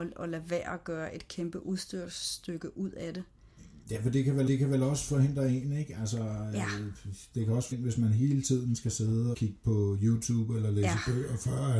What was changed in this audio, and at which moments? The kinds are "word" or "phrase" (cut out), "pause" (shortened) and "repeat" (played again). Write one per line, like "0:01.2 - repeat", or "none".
0:03.8 - pause
0:04.5 - repeat
0:07.7 - word
0:09.3 - word